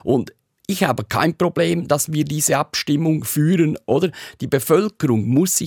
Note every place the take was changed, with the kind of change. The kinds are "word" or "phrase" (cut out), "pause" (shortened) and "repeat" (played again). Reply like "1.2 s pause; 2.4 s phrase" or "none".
none